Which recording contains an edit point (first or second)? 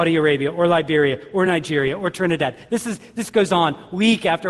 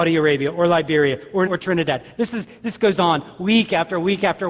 second